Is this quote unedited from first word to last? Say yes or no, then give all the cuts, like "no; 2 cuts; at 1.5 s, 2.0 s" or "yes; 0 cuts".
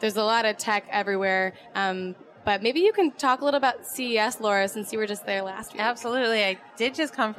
yes; 0 cuts